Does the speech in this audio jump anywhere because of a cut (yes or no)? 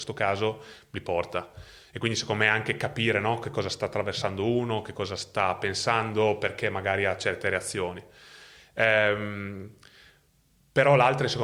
no